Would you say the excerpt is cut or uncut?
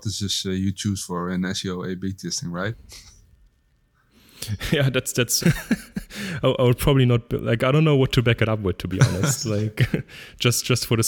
cut